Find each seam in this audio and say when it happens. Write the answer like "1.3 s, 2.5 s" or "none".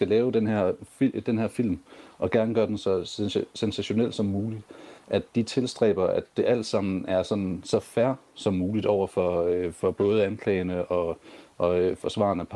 none